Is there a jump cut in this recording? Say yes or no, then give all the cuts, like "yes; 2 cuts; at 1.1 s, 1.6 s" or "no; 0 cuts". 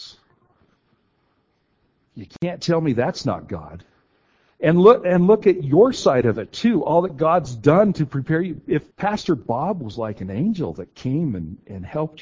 yes; 2 cuts; at 4.1 s, 8.9 s